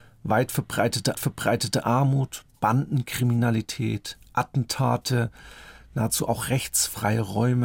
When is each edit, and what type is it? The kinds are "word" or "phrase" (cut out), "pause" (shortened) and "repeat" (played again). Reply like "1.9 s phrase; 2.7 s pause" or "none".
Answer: 1.1 s repeat

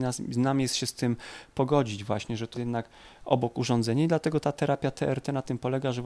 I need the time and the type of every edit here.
2.5 s word

